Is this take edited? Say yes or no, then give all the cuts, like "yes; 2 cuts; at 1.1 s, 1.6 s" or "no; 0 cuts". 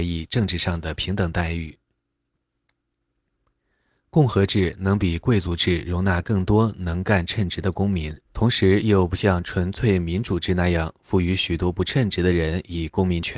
yes; 1 cut; at 8.2 s